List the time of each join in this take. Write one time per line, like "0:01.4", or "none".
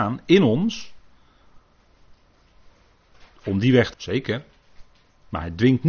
0:03.9